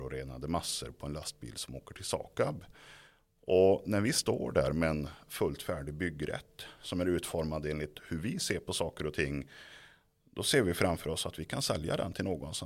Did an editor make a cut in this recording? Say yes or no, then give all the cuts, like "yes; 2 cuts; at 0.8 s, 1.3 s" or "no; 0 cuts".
no; 0 cuts